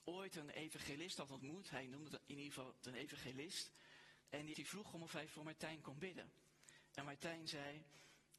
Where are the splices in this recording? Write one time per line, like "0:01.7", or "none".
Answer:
0:02.8
0:04.2
0:04.5